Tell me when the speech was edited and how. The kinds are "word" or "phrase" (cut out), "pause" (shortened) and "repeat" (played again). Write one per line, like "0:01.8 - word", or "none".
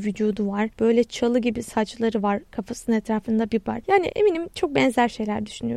0:03.6 - word
0:04.1 - word